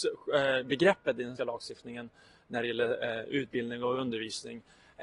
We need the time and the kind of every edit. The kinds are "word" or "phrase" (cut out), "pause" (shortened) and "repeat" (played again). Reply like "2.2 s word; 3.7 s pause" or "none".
1.4 s word